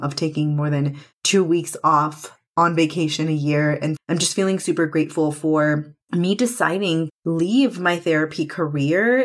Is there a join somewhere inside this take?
yes; 5 cuts; at 1.1 s, 2.5 s, 4.0 s, 6.0 s, 7.1 s

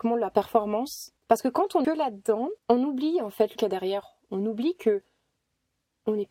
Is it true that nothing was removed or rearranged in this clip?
no; 4 cuts; at 1.2 s, 1.8 s, 2.6 s, 3.6 s

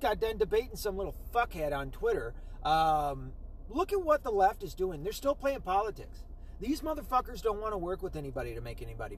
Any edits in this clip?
no; 0 cuts

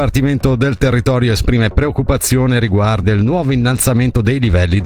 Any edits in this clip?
yes; 1 cut; at 3.0 s

